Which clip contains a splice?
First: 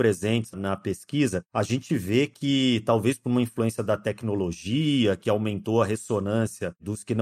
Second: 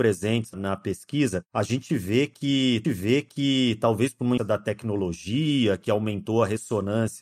second; 2 cuts; at 2.8 s, 4.4 s

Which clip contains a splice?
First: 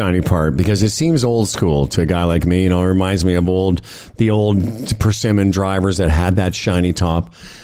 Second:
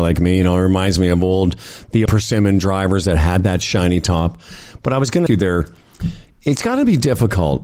second; 2 cuts; at 2.1 s, 5.3 s

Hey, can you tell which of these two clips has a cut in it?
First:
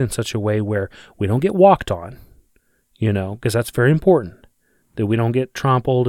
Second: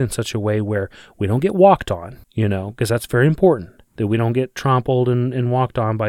second; 2 cuts; at 2.2 s, 3.9 s

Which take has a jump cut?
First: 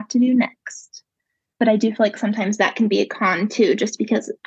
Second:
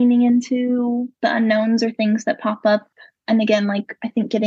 second; 1 cut; at 1.2 s

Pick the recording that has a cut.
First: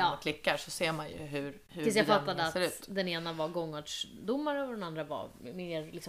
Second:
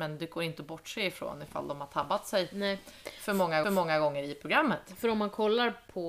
second; 1 cut; at 3.6 s

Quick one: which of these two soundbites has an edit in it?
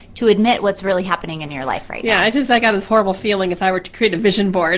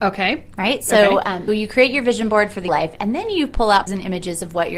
second; 3 cuts; at 1.5 s, 2.7 s, 3.9 s

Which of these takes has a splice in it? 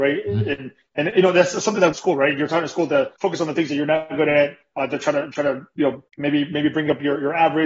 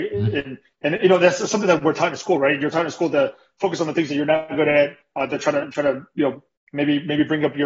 first; 3 cuts; at 1.9 s, 3.2 s, 6.1 s

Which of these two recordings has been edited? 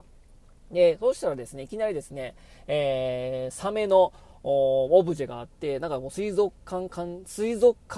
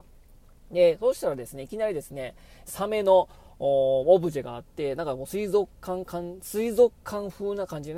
second; 1 cut; at 2.7 s

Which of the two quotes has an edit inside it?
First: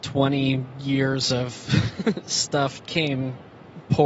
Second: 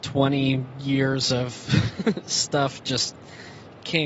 first; 1 cut; at 2.8 s

